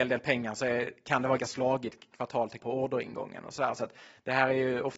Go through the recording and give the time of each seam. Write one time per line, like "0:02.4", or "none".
0:01.4
0:02.6